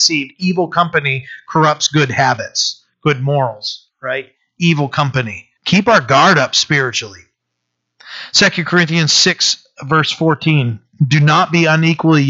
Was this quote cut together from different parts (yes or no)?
yes